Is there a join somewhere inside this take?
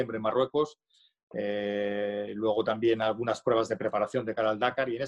no; 0 cuts

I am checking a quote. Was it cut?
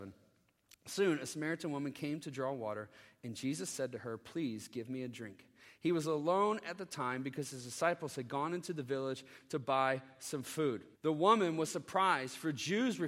yes; 1 cut; at 10.9 s

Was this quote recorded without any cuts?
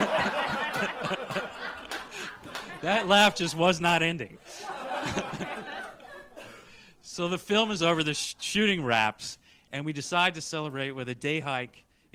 yes; 0 cuts

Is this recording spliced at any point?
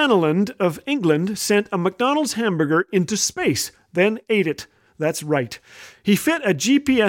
no; 0 cuts

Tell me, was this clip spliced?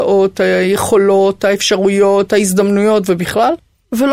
no; 0 cuts

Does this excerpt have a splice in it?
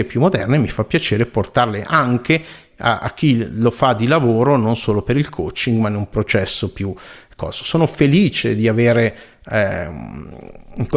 no; 0 cuts

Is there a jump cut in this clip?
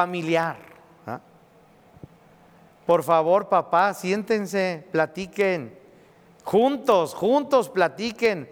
no; 0 cuts

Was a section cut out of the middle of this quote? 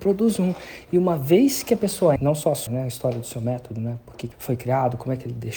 yes; 3 cuts; at 2.2 s, 2.7 s, 4.3 s

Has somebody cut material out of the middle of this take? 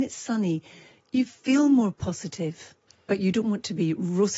yes; 1 cut; at 2.9 s

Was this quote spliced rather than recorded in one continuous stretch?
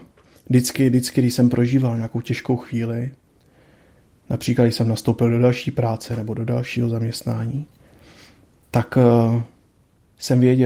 no; 0 cuts

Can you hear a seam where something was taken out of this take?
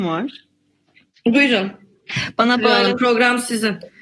no; 0 cuts

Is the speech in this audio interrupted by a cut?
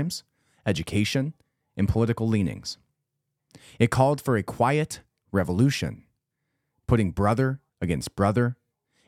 yes; 1 cut; at 7.7 s

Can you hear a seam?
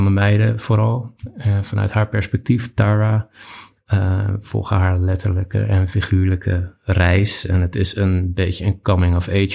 no; 0 cuts

